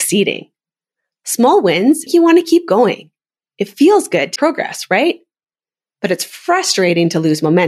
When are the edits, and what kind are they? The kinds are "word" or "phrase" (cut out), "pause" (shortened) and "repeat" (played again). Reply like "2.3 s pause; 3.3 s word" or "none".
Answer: 2.1 s word; 4.4 s word